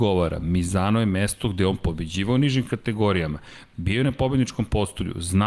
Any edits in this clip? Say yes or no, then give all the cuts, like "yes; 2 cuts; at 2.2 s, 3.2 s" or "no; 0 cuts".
no; 0 cuts